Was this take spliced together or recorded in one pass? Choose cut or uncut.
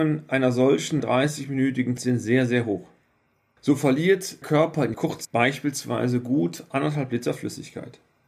cut